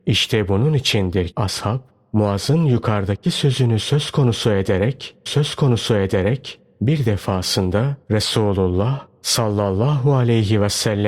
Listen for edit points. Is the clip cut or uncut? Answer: cut